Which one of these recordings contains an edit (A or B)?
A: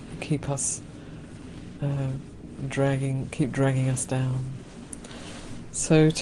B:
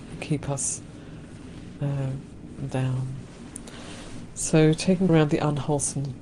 B